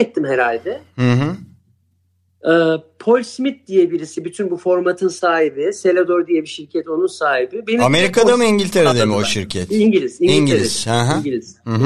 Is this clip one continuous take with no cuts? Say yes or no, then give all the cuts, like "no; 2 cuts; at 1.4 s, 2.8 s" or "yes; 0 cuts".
yes; 0 cuts